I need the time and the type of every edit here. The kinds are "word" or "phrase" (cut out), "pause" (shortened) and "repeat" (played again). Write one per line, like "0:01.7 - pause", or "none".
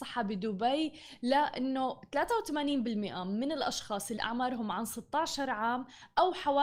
0:04.2 - word